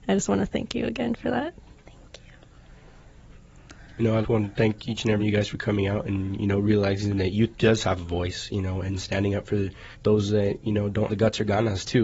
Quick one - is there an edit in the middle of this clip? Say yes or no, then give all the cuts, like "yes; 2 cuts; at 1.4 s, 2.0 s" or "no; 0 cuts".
yes; 5 cuts; at 1.7 s, 4.2 s, 5.2 s, 9.9 s, 11.1 s